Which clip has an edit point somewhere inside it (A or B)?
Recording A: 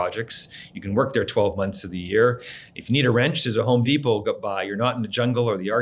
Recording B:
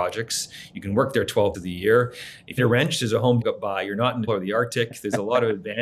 B